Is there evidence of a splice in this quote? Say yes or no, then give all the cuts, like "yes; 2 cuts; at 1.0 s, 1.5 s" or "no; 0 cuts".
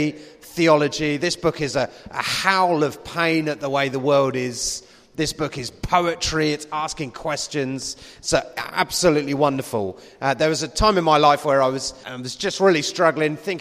yes; 1 cut; at 12.0 s